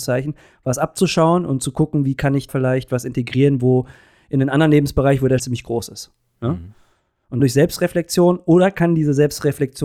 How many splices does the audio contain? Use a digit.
3